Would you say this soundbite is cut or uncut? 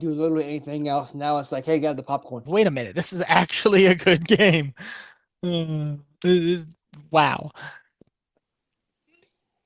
cut